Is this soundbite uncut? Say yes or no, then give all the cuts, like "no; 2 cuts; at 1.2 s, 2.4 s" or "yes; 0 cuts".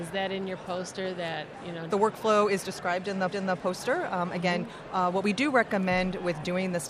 no; 2 cuts; at 1.9 s, 3.3 s